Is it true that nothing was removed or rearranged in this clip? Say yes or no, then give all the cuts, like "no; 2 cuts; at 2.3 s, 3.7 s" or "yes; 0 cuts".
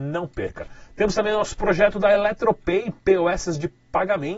yes; 0 cuts